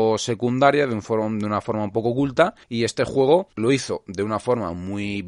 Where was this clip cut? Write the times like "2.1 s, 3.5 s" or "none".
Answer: 2.6 s, 3.5 s